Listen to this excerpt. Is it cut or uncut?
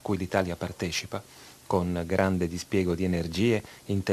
uncut